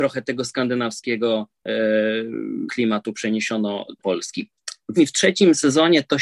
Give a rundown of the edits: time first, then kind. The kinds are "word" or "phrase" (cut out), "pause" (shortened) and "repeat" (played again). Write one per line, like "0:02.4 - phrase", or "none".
0:02.7 - word
0:04.0 - word
0:05.0 - word